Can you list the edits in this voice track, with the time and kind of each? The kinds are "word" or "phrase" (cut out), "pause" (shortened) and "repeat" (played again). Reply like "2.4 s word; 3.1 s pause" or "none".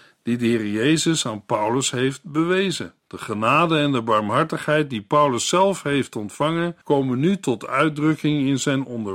3.0 s pause; 6.8 s pause